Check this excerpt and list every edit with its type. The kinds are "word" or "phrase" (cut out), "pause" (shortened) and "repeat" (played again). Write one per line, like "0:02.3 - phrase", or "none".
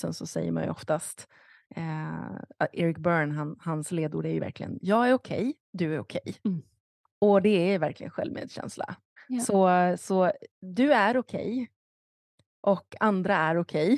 0:05.6 - pause
0:06.4 - pause
0:09.2 - pause
0:10.5 - pause